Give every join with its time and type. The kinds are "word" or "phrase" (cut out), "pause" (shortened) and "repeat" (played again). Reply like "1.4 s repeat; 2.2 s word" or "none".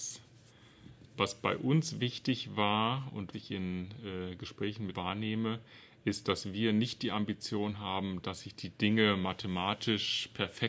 3.3 s word; 4.9 s phrase

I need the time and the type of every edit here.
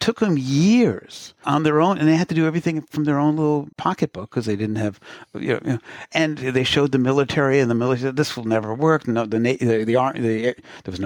3.7 s pause

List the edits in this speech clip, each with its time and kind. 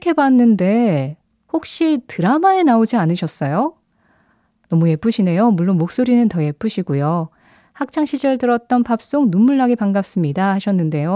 none

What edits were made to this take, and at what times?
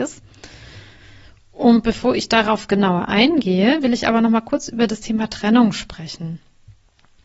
none

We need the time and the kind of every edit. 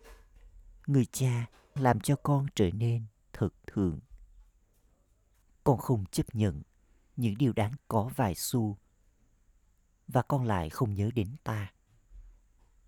1.8 s word; 3.7 s word; 7.8 s word

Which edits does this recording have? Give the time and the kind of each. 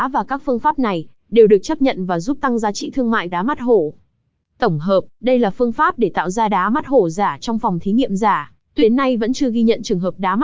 3.3 s word; 8.8 s word

